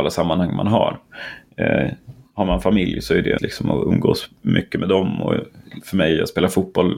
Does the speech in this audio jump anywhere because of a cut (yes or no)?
yes